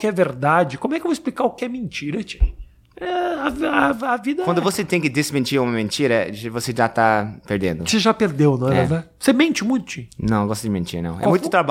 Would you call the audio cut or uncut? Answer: uncut